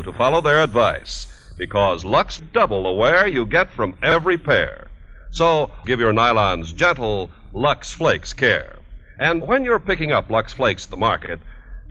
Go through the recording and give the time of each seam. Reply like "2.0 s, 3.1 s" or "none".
2.4 s, 5.8 s, 9.4 s